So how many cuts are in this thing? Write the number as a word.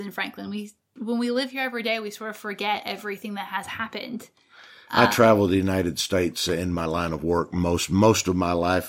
zero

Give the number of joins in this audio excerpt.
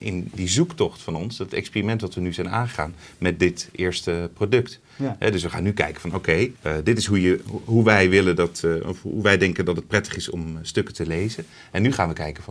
one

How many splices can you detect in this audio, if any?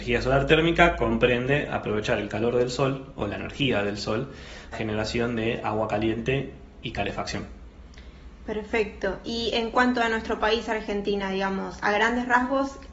one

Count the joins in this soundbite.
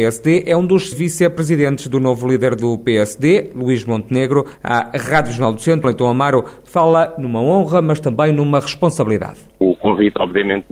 three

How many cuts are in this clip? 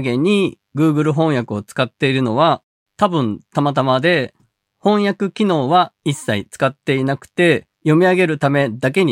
one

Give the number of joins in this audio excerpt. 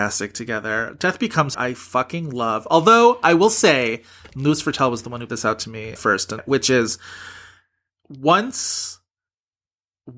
four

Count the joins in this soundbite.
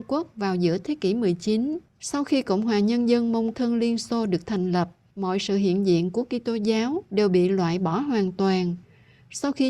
two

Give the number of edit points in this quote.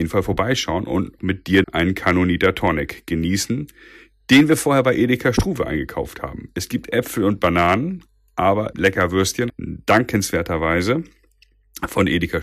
four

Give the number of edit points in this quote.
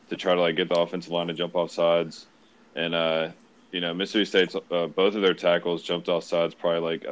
zero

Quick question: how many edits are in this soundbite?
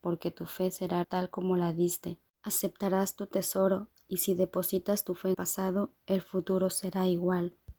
three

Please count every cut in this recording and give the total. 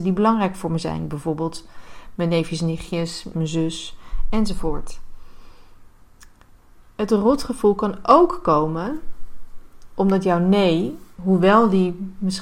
one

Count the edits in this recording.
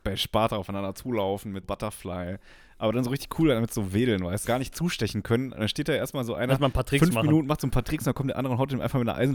two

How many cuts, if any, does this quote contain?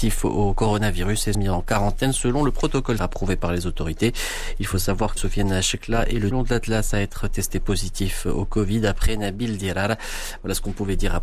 four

